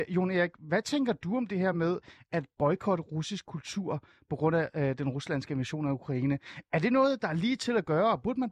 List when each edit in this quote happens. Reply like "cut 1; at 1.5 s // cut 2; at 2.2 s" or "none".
none